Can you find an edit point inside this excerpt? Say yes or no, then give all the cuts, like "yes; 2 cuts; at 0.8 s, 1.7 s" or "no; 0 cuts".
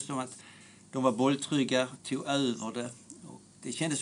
yes; 1 cut; at 2.0 s